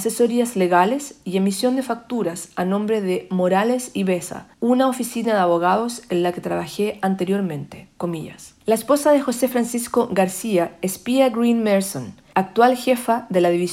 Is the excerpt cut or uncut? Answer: cut